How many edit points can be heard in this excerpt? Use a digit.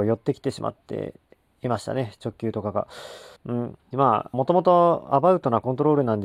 3